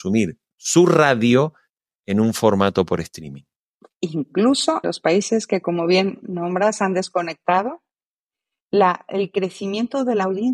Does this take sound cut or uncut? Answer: cut